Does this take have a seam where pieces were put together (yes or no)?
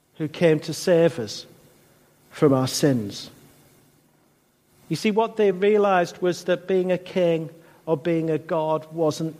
no